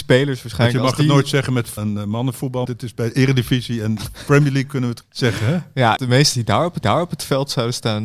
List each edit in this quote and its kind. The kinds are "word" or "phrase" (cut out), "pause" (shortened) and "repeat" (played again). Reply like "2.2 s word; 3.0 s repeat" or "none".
1.8 s word; 2.7 s word; 5.0 s word; 6.0 s phrase; 6.3 s phrase; 6.8 s repeat